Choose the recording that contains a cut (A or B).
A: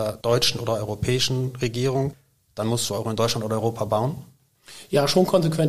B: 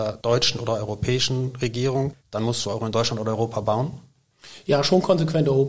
B